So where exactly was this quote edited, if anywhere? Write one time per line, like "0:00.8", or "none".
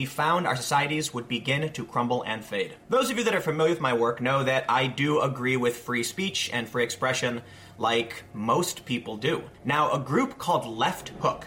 0:09.5